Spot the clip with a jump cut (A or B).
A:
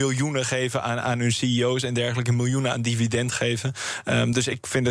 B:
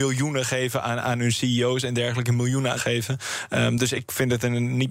B